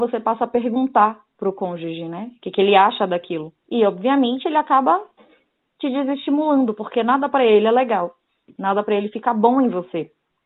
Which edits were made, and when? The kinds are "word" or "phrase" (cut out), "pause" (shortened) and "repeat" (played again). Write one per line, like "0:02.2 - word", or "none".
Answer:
0:03.6 - pause

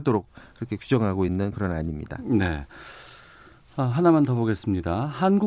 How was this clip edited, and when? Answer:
none

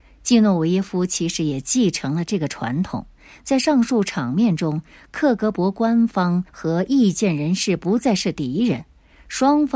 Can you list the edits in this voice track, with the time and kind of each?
0:06.5 - pause

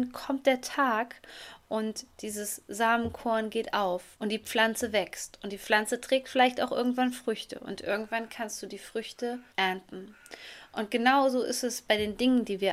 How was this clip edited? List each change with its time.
0:04.1 - pause
0:09.5 - pause

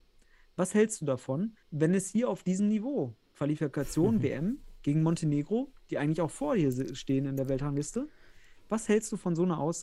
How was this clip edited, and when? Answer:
0:01.6 - pause

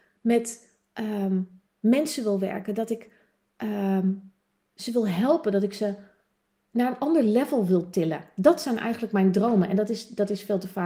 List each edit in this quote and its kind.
none

